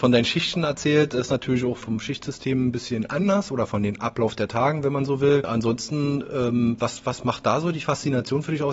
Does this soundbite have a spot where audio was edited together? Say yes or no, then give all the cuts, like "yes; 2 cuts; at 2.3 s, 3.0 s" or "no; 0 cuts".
yes; 1 cut; at 1.8 s